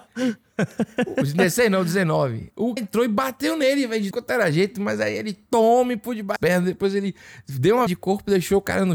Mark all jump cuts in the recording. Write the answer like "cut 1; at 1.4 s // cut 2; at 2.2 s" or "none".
cut 1; at 2.8 s // cut 2; at 4.1 s // cut 3; at 6.4 s // cut 4; at 7.9 s